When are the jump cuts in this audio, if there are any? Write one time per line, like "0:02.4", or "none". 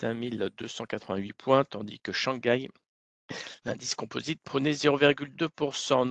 none